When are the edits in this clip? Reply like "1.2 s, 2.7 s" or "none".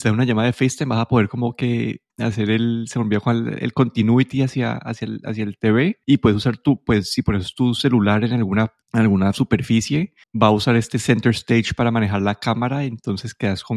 2.1 s, 6.0 s, 8.8 s, 10.2 s